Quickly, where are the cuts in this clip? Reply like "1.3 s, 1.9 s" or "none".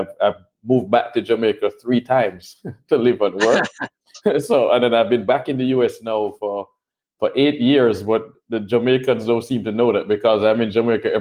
none